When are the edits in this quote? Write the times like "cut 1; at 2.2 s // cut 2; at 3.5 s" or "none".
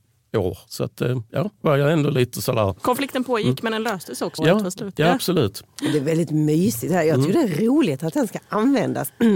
cut 1; at 1.6 s // cut 2; at 4.4 s